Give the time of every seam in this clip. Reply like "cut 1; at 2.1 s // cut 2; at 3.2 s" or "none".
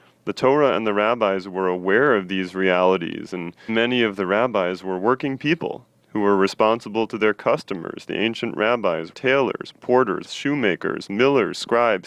cut 1; at 3.7 s // cut 2; at 9.1 s // cut 3; at 10.3 s